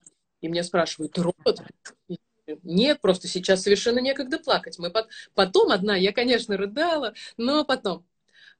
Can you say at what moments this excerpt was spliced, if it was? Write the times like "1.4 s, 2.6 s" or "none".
none